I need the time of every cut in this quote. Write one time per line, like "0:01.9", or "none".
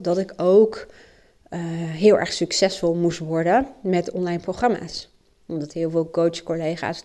none

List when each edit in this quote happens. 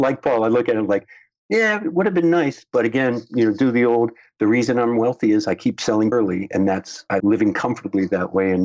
0:06.1
0:07.2

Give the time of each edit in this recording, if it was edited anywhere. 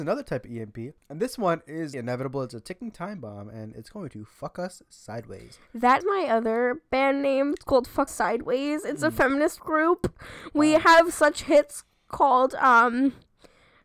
0:01.0
0:01.9
0:06.0
0:08.1
0:09.6

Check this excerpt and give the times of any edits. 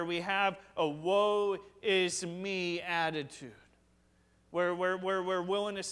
none

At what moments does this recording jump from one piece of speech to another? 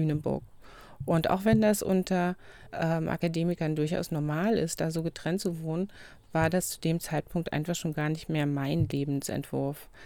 0:02.7

